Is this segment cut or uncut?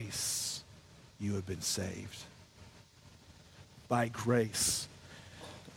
uncut